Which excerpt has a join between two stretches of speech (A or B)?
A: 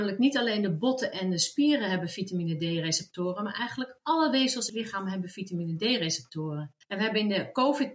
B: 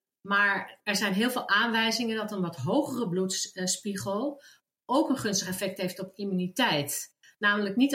A